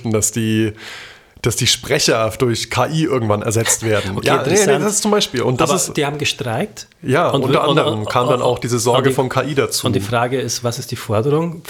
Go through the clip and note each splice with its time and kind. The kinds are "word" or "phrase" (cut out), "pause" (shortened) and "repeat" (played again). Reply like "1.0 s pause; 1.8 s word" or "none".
none